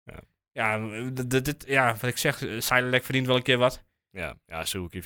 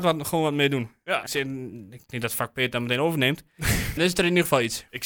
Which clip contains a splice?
second; 3 cuts; at 1.3 s, 2.1 s, 4.0 s

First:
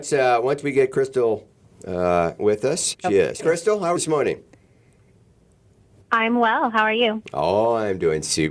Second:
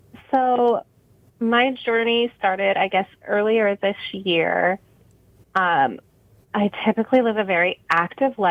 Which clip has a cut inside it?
first; 4 cuts; at 2.4 s, 2.9 s, 3.4 s, 4.0 s

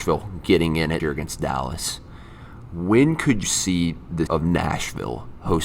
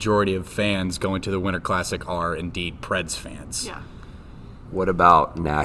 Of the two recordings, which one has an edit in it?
first; 3 cuts; at 1.0 s, 3.4 s, 4.3 s

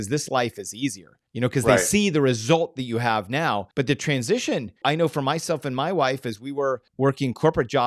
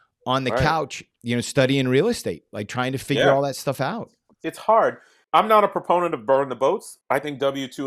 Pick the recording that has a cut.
first; 4 cuts; at 1.3 s, 3.7 s, 4.8 s, 6.9 s

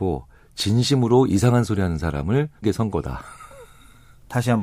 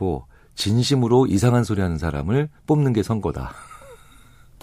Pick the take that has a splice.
first; 1 cut; at 2.6 s

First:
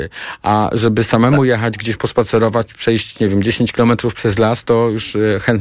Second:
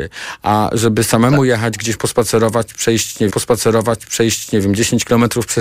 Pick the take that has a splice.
second; 1 cut; at 3.3 s

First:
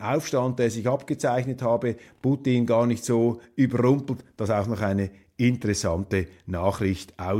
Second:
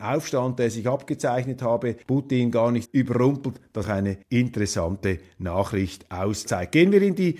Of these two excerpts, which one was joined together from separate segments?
second; 5 cuts; at 2.0 s, 2.9 s, 3.8 s, 4.2 s, 6.5 s

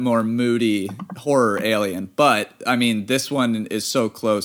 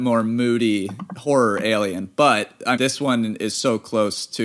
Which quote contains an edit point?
second; 1 cut; at 2.8 s

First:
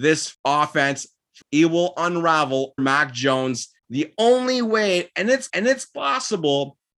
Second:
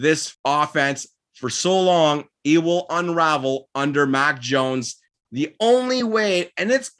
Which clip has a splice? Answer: first; 4 cuts; at 1.4 s, 2.8 s, 3.8 s, 5.5 s

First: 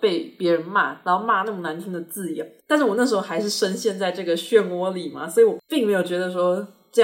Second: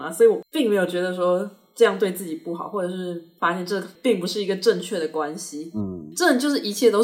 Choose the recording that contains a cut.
first; 1 cut; at 2.6 s

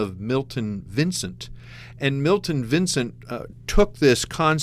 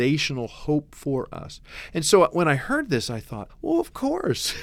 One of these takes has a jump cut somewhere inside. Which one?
second; 1 cut; at 3.5 s

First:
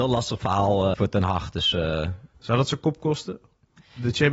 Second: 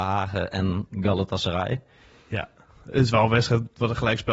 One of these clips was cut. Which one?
first; 2 cuts; at 0.9 s, 2.3 s

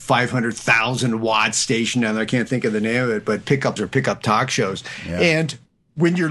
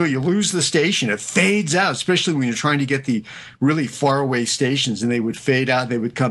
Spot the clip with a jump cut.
first; 1 cut; at 3.8 s

